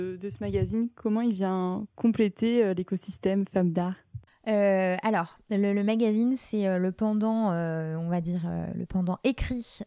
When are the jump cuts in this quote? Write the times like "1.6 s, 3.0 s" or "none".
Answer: 4.3 s

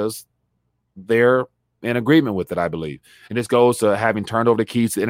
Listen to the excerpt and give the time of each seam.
none

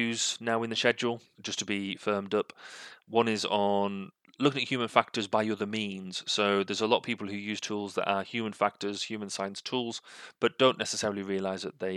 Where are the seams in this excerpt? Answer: 1.4 s

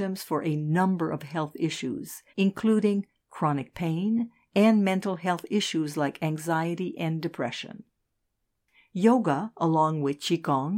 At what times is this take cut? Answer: 2.3 s

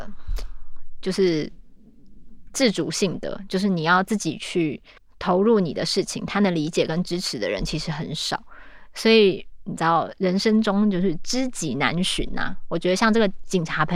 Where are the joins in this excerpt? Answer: 5.0 s

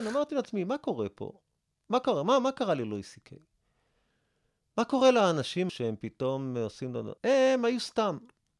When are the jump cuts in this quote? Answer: 5.7 s, 7.2 s

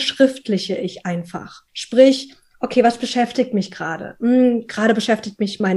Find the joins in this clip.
1.7 s

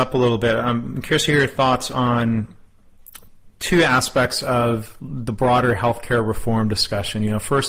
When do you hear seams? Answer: none

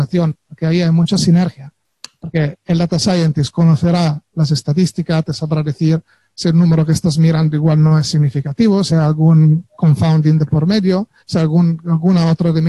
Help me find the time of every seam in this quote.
11.2 s

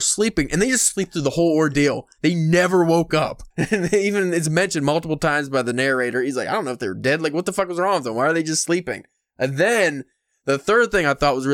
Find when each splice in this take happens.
3.5 s

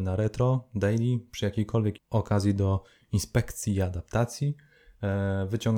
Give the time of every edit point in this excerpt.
2.0 s

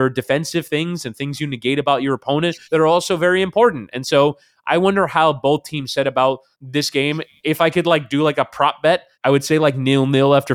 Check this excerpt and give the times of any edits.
2.6 s, 6.5 s, 9.1 s

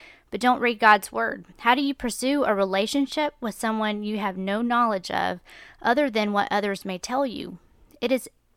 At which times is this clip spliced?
1.5 s

